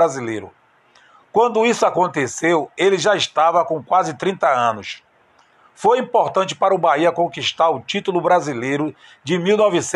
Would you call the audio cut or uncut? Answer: uncut